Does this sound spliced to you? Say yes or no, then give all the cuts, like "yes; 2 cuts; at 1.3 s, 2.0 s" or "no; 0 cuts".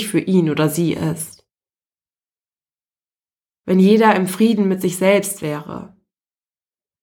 no; 0 cuts